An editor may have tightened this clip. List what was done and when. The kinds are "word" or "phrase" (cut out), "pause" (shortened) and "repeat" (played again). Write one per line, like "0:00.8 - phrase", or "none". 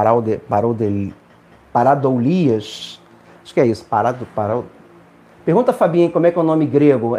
none

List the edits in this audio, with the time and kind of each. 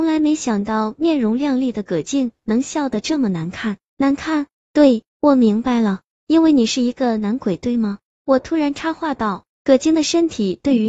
0:05.1 - pause

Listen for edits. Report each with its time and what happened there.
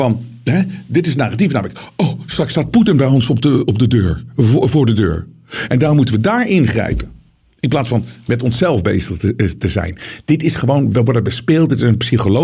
none

